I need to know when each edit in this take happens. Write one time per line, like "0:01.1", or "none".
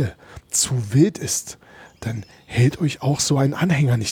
none

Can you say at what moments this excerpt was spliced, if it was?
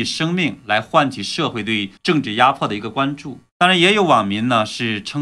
0:02.0
0:03.5

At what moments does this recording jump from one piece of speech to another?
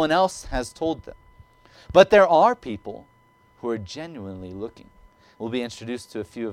none

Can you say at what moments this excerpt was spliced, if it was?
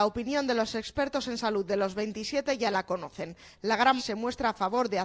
0:04.0

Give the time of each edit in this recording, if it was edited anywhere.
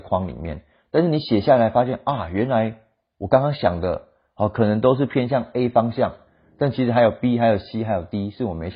none

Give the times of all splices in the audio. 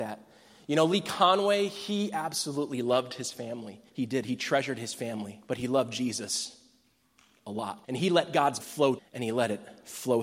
0:03.9
0:05.4
0:07.8
0:08.6
0:09.0

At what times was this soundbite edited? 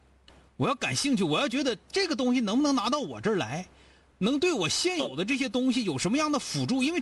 none

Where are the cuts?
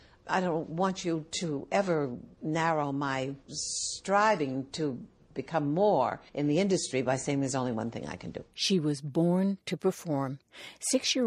0:03.4
0:06.3

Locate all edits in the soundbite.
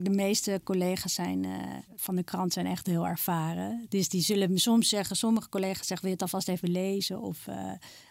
0:01.9

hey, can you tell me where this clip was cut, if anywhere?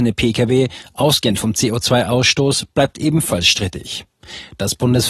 none

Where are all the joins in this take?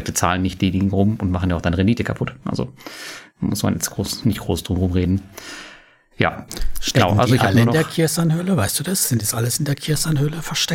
none

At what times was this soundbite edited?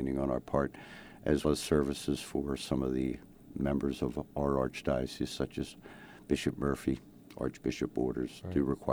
0:01.4

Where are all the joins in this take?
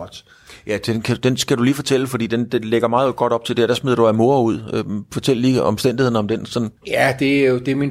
0:06.8

